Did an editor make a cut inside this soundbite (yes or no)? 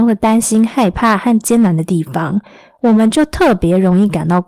no